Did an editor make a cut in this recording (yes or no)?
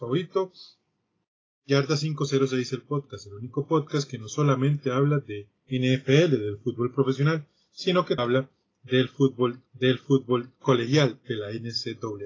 yes